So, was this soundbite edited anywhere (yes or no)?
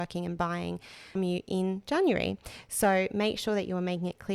yes